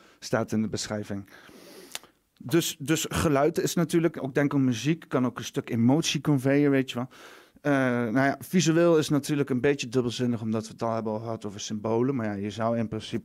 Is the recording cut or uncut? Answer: uncut